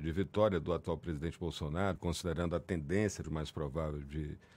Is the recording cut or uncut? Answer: cut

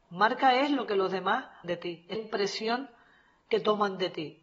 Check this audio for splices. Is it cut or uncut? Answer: cut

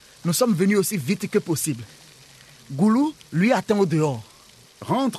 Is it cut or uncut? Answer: uncut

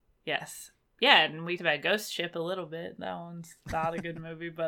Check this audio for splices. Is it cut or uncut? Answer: cut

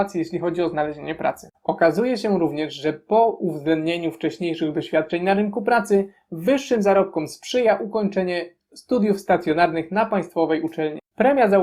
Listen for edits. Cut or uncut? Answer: uncut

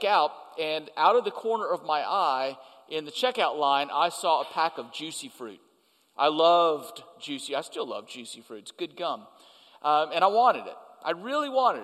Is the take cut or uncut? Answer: uncut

